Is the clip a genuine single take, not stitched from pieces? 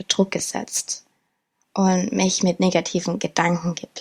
yes; 0 cuts

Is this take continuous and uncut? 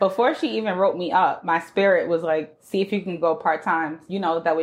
yes; 0 cuts

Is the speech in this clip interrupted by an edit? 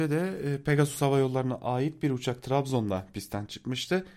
no; 0 cuts

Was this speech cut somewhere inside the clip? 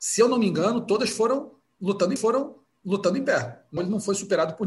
yes; 2 cuts; at 2.2 s, 3.8 s

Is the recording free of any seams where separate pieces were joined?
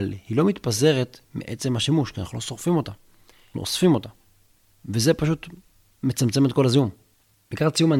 no; 1 cut; at 3.5 s

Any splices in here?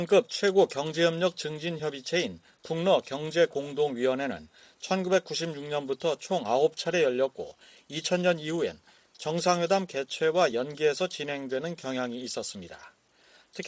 no; 0 cuts

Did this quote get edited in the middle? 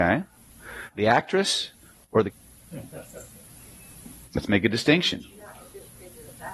yes; 2 cuts; at 0.9 s, 2.3 s

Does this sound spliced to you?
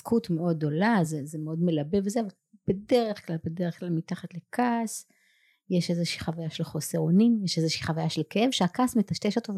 no; 0 cuts

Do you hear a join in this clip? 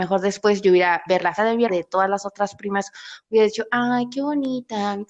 yes; 3 cuts; at 1.1 s, 1.4 s, 1.7 s

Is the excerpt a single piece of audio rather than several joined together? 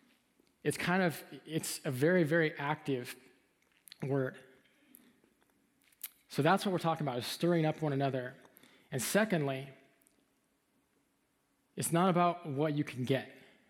yes; 0 cuts

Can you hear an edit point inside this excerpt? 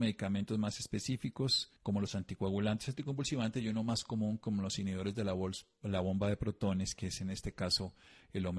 yes; 1 cut; at 1.8 s

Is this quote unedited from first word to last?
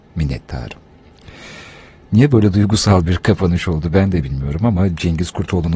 yes; 0 cuts

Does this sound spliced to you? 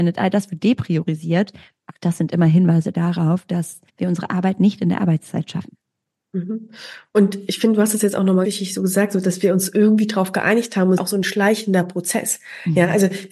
yes; 3 cuts; at 3.9 s, 8.4 s, 11.0 s

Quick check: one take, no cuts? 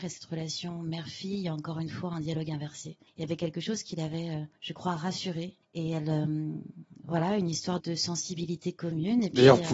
no; 4 cuts; at 3.1 s, 4.6 s, 5.6 s, 7.8 s

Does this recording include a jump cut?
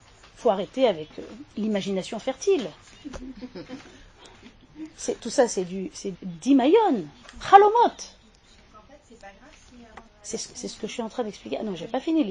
yes; 3 cuts; at 1.5 s, 6.1 s, 10.1 s

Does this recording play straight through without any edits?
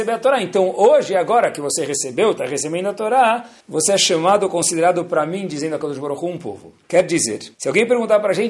no; 3 cuts; at 3.6 s, 6.8 s, 7.5 s

